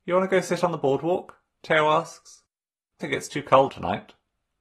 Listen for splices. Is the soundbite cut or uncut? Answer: cut